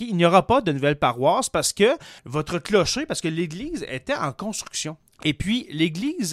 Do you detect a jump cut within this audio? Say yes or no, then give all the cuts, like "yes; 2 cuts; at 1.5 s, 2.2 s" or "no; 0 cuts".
yes; 2 cuts; at 2.2 s, 5.0 s